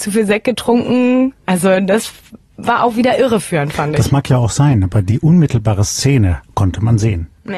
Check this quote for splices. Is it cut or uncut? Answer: uncut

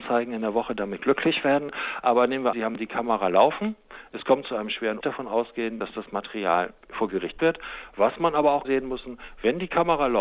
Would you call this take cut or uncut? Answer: cut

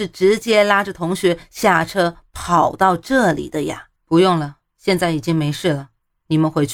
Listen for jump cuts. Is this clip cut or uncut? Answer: cut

